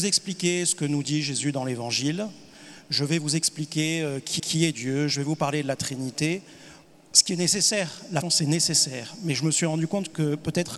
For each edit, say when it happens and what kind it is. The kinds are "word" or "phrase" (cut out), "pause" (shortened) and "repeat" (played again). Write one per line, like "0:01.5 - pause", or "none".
0:04.4 - repeat
0:06.8 - pause
0:08.2 - word